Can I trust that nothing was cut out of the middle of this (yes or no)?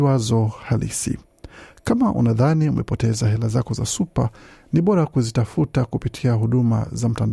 yes